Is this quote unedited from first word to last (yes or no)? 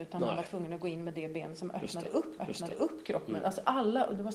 no